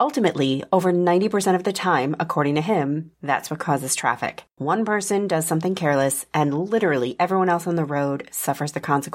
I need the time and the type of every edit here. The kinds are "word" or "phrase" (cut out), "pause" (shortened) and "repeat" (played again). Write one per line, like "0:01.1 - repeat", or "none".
0:03.1 - pause
0:04.5 - pause